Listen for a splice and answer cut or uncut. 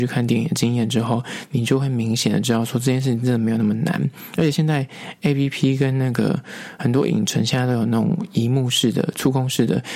uncut